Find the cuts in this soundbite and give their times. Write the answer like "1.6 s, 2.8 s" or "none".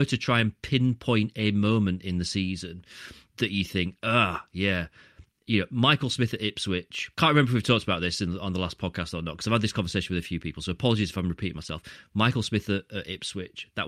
7.1 s